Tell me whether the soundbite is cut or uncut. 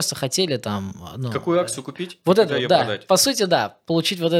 uncut